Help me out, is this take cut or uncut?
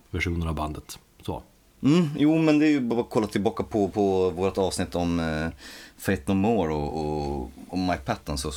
uncut